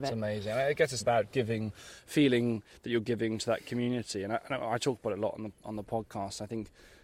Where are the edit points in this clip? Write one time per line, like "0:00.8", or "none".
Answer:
0:01.0
0:05.6